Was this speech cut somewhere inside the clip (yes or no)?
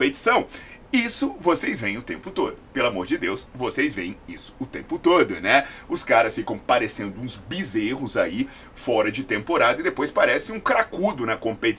no